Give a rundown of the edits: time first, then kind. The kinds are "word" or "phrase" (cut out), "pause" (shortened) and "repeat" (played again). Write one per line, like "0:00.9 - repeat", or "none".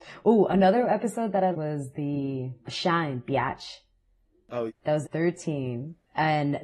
0:01.5 - word
0:02.6 - word
0:04.7 - word
0:05.0 - word